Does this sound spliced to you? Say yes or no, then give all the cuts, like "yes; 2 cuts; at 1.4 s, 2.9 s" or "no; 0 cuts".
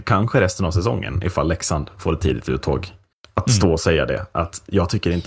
yes; 1 cut; at 3.1 s